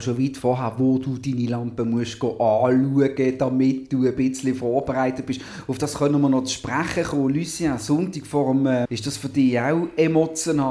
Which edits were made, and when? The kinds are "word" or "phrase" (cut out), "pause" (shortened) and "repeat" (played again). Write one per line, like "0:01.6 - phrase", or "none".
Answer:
0:08.8 - word